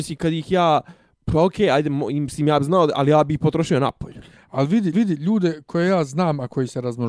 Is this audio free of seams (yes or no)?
no